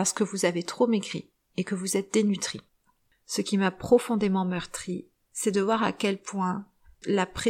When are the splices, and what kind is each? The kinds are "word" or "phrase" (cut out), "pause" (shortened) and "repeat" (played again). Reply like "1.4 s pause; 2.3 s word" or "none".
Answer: none